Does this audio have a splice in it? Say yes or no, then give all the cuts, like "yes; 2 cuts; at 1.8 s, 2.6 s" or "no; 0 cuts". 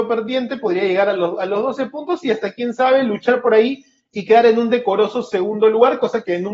no; 0 cuts